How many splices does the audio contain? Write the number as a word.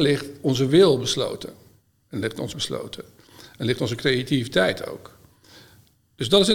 one